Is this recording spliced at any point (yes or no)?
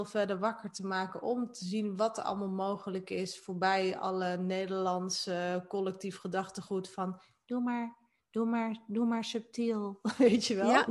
no